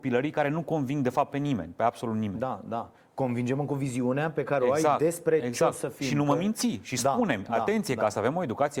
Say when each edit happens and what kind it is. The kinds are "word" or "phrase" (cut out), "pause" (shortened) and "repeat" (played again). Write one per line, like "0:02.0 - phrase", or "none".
none